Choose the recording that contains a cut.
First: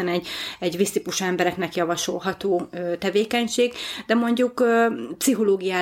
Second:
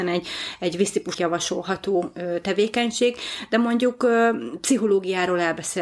second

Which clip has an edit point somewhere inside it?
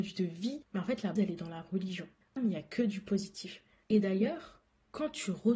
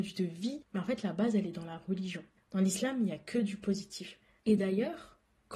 first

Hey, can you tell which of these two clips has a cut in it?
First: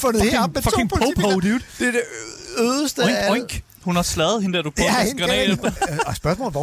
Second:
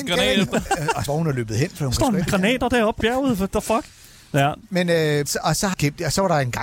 second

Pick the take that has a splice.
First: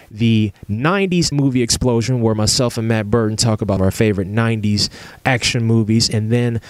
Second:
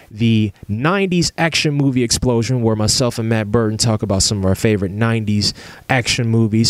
first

